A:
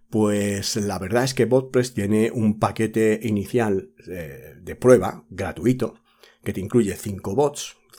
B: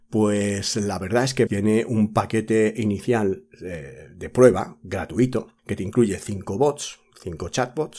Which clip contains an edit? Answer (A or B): B